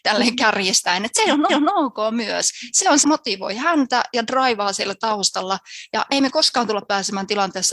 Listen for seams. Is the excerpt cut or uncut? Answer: cut